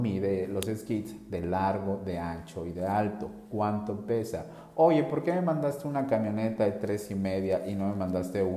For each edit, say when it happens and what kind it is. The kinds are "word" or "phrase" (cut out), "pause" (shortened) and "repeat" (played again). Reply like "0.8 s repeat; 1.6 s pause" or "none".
none